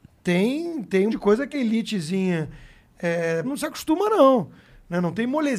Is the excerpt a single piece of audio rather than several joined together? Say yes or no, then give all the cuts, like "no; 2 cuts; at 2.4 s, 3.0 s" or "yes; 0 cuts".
no; 3 cuts; at 1.1 s, 1.5 s, 3.4 s